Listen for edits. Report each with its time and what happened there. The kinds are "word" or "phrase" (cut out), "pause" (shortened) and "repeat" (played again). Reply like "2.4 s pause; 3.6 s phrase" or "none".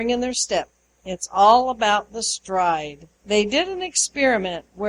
3.1 s pause